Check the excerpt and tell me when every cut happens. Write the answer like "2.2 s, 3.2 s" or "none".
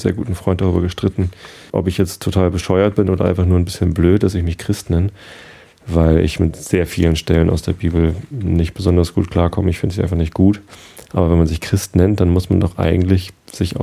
1.7 s